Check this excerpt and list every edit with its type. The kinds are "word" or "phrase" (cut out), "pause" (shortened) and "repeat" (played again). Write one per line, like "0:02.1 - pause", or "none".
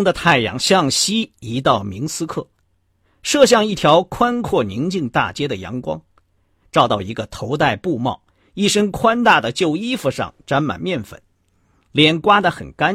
none